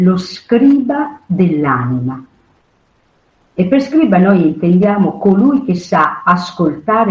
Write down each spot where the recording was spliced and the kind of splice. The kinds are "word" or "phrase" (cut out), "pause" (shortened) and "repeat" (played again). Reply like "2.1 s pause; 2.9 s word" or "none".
none

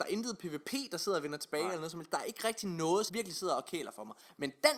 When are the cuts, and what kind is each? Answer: 3.1 s word

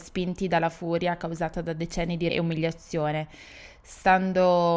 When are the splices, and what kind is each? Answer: 2.3 s word

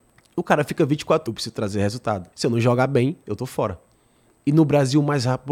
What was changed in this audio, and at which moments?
1.3 s phrase; 2.3 s pause

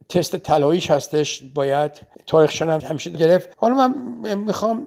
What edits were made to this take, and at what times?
2.1 s pause; 2.8 s word; 3.1 s word; 3.5 s pause

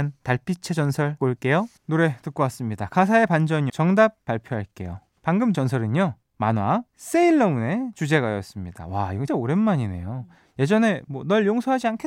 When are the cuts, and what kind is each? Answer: 1.2 s word; 1.8 s pause; 3.7 s word; 5.5 s phrase; 6.9 s pause; 9.3 s word

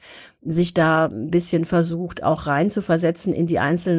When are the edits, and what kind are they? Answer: none

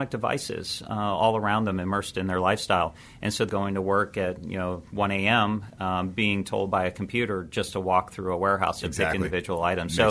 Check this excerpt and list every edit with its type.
3.5 s phrase

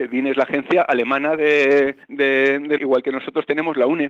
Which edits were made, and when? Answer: 2.0 s pause; 2.8 s word

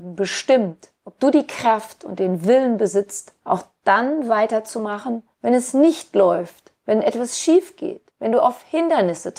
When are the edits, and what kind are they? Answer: 5.3 s pause; 6.8 s pause; 8.1 s pause

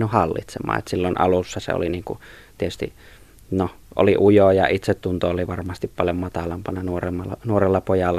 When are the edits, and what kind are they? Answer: none

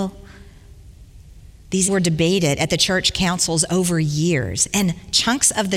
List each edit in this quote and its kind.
1.9 s word

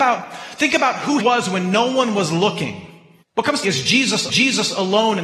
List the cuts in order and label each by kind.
1.2 s word; 3.2 s pause; 3.6 s phrase; 4.3 s repeat

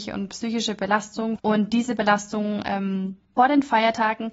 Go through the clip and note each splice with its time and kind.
none

